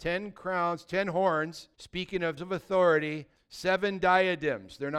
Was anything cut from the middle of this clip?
yes; 3 cuts; at 1.7 s, 2.4 s, 3.4 s

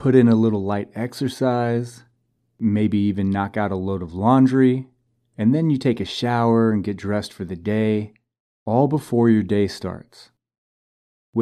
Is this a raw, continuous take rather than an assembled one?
yes; 0 cuts

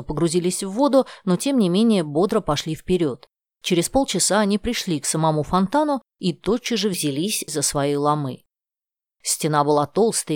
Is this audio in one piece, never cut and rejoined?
yes; 0 cuts

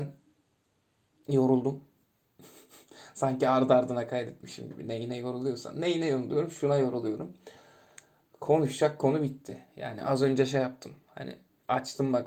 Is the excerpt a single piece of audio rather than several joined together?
yes; 0 cuts

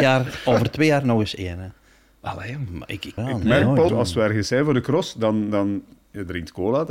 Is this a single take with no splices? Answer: no; 2 cuts; at 3.2 s, 3.9 s

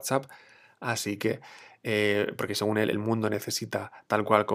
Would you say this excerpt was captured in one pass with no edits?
yes; 0 cuts

